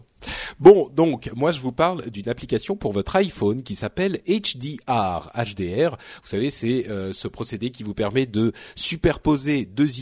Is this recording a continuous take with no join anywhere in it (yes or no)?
yes